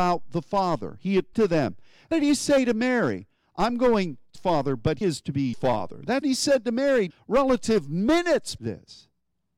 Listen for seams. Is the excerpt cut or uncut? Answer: cut